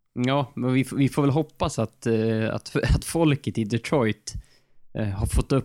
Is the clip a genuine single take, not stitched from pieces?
yes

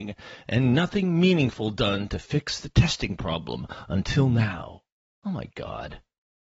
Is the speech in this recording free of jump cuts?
yes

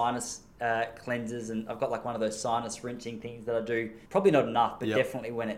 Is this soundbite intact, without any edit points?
no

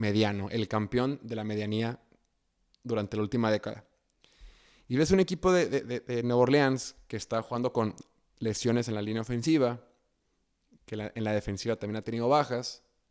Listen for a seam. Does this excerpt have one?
no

